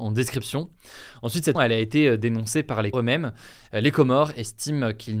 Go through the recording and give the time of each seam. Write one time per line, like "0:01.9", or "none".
0:01.6
0:02.9